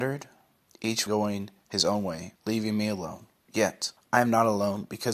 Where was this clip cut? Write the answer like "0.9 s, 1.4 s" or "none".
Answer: 1.1 s, 2.4 s